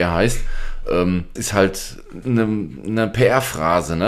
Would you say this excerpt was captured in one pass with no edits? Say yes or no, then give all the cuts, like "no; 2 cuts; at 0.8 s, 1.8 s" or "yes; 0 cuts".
no; 2 cuts; at 1.4 s, 2.2 s